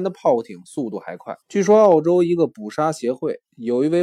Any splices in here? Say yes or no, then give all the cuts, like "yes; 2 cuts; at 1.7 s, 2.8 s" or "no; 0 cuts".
yes; 1 cut; at 1.4 s